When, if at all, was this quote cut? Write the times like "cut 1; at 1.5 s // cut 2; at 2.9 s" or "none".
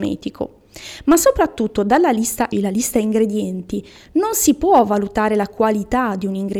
cut 1; at 2.5 s